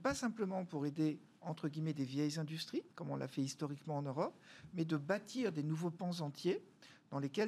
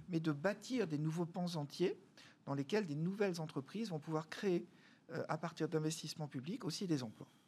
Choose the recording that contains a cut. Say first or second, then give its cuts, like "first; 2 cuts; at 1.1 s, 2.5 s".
first; 1 cut; at 2.9 s